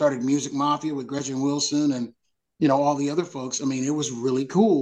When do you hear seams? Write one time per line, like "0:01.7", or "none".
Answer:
none